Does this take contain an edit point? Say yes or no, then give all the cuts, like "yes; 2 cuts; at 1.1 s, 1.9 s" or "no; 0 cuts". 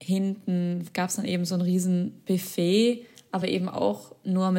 no; 0 cuts